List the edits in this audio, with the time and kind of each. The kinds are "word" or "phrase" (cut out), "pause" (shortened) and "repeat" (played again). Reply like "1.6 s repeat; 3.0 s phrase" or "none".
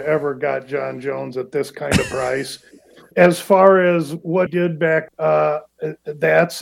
3.1 s word; 4.5 s word; 5.1 s word